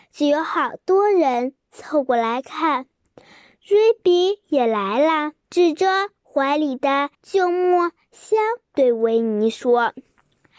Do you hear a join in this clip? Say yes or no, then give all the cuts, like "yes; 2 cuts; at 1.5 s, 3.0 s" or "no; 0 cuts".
yes; 3 cuts; at 5.4 s, 7.1 s, 8.6 s